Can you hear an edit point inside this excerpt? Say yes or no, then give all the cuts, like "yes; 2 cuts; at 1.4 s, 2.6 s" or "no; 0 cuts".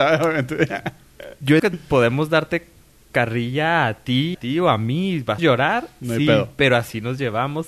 yes; 3 cuts; at 1.6 s, 4.3 s, 5.4 s